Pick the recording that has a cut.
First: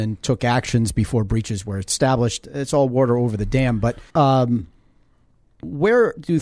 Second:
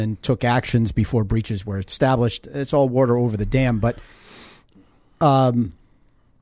first; 1 cut; at 4.1 s

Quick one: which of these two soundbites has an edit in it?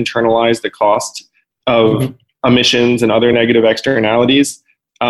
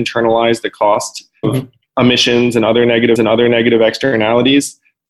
second; 2 cuts; at 1.4 s, 3.2 s

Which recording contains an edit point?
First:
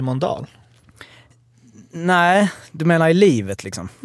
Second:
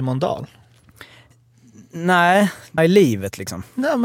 second; 1 cut; at 2.8 s

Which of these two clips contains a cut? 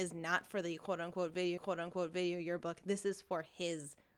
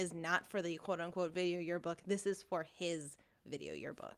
first; 1 cut; at 1.6 s

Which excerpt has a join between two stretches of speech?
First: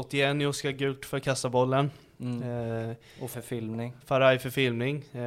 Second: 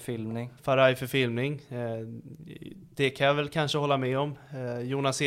first; 2 cuts; at 1.0 s, 3.3 s

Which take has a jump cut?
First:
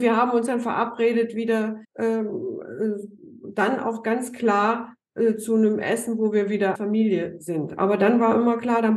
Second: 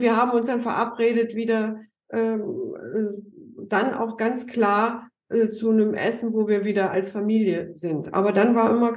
first; 2 cuts; at 1.8 s, 6.7 s

